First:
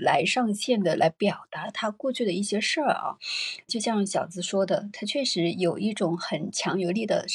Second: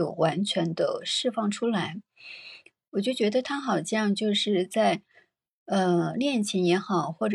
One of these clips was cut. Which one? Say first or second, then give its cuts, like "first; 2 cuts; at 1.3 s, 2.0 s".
first; 1 cut; at 3.7 s